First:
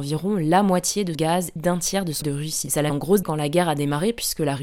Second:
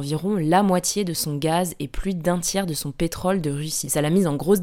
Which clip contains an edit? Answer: first; 5 cuts; at 1.1 s, 1.6 s, 2.2 s, 2.9 s, 3.2 s

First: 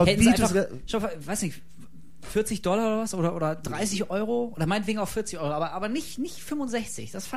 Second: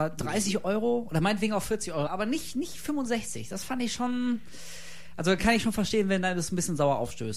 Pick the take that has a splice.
second; 1 cut; at 2.1 s

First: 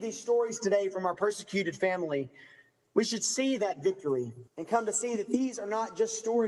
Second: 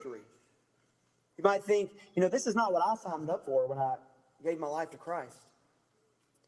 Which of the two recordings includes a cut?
first; 1 cut; at 4.5 s

